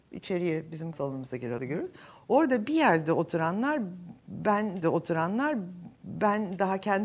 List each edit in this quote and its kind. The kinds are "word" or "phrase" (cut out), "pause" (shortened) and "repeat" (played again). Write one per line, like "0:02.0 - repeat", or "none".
0:00.9 - word
0:01.6 - word
0:04.8 - repeat